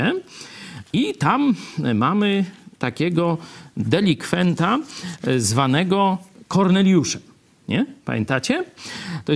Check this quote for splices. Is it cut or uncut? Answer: uncut